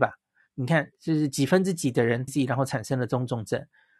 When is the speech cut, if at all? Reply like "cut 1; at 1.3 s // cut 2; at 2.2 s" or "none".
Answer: cut 1; at 0.9 s // cut 2; at 2.3 s